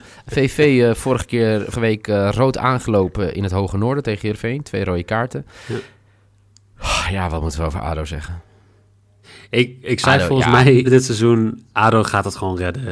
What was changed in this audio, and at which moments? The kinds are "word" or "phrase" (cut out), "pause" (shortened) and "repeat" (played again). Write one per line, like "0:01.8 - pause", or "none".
0:01.7 - word
0:09.2 - pause
0:10.8 - word